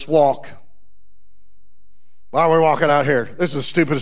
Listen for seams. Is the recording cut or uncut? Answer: uncut